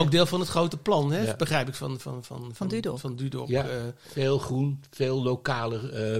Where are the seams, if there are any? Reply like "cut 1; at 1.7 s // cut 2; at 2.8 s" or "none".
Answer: none